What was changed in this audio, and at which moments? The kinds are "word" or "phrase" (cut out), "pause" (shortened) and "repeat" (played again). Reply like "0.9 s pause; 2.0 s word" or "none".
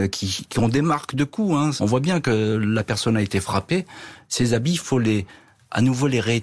none